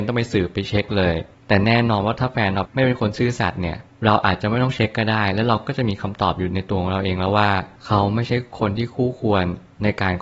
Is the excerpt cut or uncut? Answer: uncut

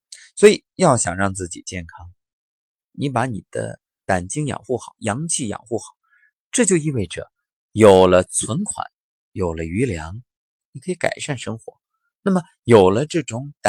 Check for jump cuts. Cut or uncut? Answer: uncut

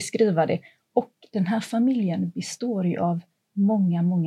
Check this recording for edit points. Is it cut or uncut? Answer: uncut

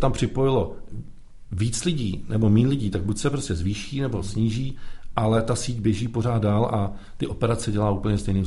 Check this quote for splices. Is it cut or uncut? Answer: uncut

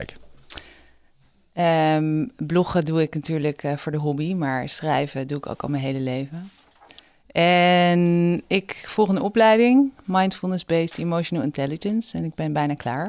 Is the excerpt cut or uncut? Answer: uncut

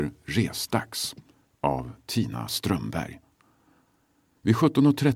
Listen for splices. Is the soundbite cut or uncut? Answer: uncut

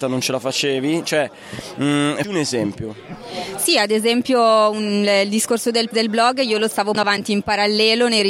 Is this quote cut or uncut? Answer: cut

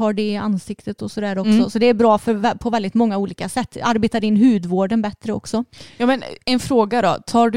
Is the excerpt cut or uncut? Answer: uncut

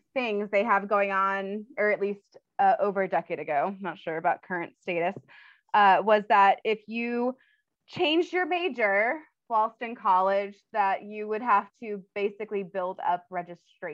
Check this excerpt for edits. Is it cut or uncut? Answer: uncut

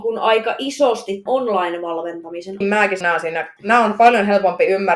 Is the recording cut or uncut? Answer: cut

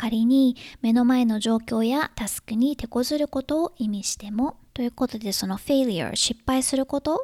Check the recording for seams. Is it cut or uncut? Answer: cut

